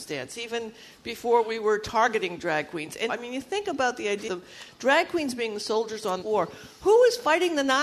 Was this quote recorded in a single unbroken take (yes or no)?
no